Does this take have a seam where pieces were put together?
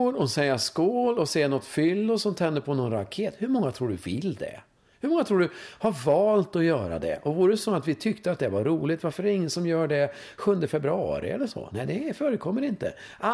no; 0 cuts

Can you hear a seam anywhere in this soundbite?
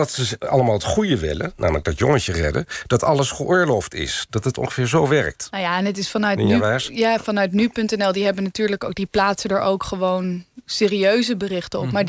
no; 0 cuts

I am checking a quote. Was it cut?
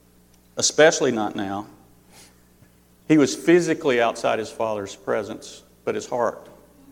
no; 0 cuts

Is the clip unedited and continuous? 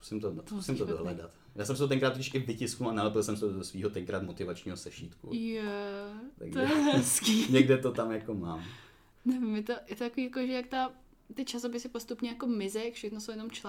yes; 0 cuts

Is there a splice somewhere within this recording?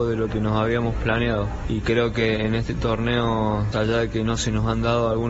yes; 1 cut; at 3.7 s

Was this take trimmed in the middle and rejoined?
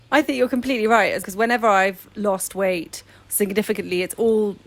yes; 1 cut; at 1.2 s

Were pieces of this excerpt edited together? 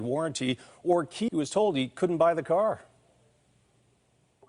yes; 1 cut; at 1.3 s

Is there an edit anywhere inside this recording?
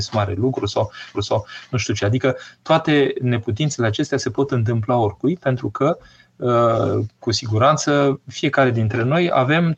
yes; 1 cut; at 1.1 s

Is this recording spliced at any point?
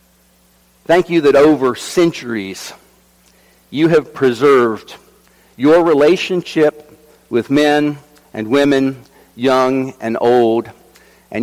no; 0 cuts

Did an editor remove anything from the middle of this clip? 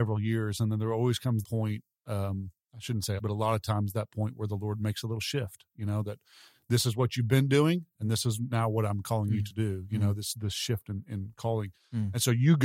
yes; 2 cuts; at 1.4 s, 3.2 s

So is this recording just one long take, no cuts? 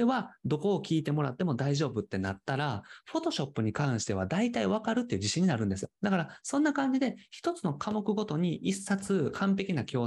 no; 1 cut; at 6.0 s

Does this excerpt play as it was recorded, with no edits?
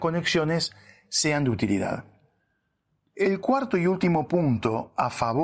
yes; 0 cuts

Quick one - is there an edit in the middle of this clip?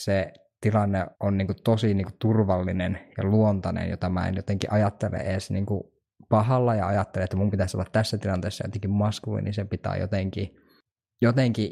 yes; 1 cut; at 1.1 s

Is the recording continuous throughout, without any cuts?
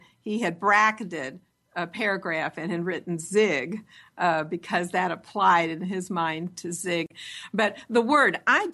yes; 0 cuts

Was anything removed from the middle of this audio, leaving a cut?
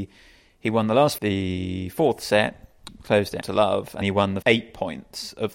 yes; 4 cuts; at 1.2 s, 3.4 s, 4.0 s, 4.4 s

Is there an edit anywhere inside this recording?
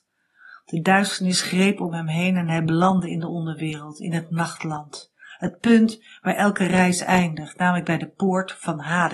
no; 0 cuts

